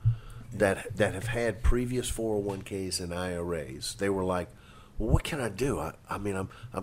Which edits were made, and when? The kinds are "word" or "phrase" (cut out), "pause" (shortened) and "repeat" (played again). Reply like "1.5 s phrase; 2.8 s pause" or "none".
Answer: none